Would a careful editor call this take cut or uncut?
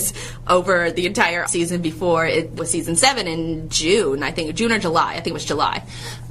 cut